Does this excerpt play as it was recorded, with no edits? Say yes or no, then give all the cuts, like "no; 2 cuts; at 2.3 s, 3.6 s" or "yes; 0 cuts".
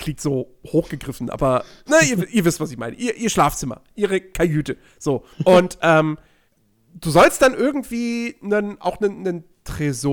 no; 2 cuts; at 5.3 s, 6.5 s